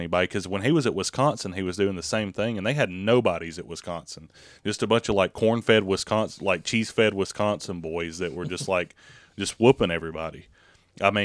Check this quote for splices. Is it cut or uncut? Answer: uncut